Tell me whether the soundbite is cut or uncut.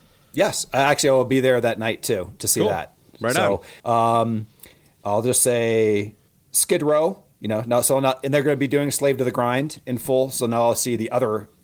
cut